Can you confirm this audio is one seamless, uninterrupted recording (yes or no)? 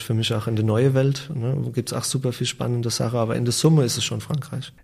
yes